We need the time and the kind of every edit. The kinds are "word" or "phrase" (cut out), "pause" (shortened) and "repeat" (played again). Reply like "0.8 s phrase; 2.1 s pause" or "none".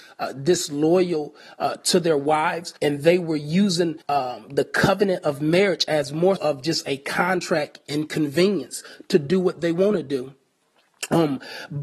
2.8 s pause; 4.0 s pause; 6.4 s word